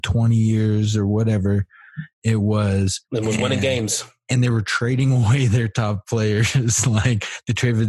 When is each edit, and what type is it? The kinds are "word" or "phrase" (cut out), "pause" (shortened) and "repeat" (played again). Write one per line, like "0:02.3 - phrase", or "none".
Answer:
0:03.0 - pause

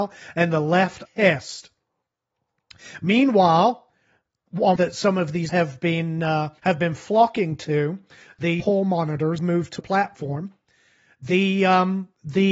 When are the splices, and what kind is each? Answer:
0:01.1 - word
0:04.8 - phrase
0:05.5 - word
0:06.6 - pause
0:08.6 - phrase
0:09.4 - word
0:09.8 - word

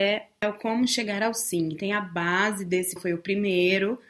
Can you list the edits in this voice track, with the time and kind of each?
0:03.0 - word

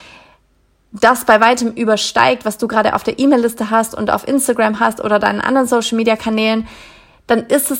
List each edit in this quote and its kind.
none

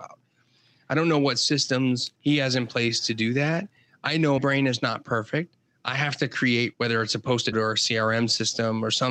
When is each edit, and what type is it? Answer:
0:02.1 - pause
0:04.4 - word
0:06.7 - word
0:07.5 - word

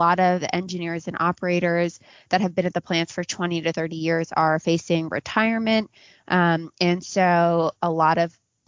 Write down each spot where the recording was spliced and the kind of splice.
none

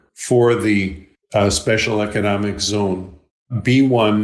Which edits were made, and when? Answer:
none

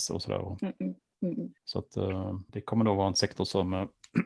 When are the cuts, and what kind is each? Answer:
none

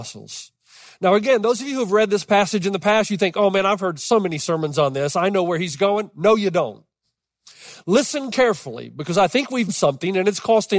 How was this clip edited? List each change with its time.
0:09.7 - word

